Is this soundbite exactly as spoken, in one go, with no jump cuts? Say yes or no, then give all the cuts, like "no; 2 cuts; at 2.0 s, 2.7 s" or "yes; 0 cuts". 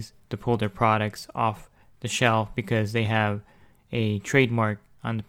yes; 0 cuts